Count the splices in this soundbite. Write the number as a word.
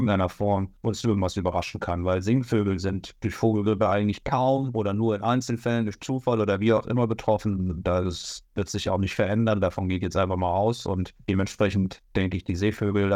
one